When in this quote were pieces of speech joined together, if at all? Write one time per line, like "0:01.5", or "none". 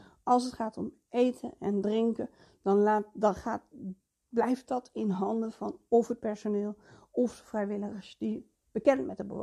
none